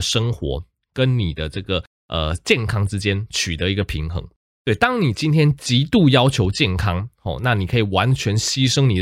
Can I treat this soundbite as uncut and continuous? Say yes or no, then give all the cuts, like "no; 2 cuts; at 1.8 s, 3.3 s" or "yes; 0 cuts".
yes; 0 cuts